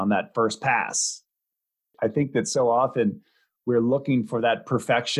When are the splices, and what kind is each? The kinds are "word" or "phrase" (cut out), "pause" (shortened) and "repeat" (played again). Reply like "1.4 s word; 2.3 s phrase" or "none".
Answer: none